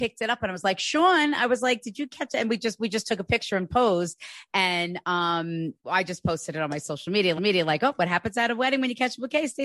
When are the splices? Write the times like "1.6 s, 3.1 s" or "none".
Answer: 5.8 s, 7.4 s